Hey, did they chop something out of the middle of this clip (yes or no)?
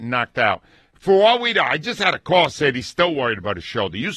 no